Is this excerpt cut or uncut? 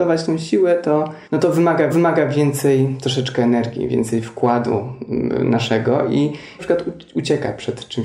cut